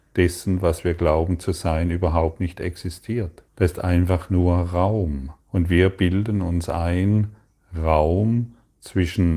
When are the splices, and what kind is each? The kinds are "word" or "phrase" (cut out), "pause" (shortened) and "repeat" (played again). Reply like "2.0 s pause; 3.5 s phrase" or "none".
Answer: 3.5 s pause; 5.4 s pause